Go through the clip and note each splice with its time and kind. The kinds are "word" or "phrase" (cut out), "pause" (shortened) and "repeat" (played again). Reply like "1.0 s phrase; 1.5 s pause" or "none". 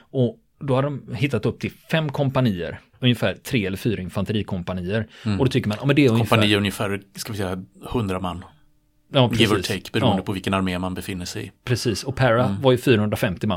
none